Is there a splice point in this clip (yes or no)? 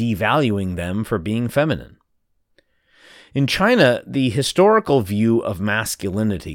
no